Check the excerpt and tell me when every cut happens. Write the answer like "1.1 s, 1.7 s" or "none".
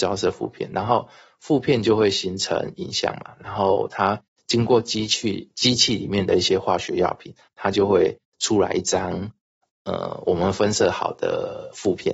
none